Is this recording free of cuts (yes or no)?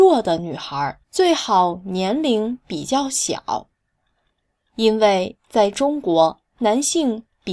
no